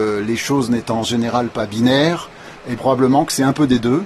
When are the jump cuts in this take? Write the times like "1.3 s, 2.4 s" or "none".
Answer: 2.8 s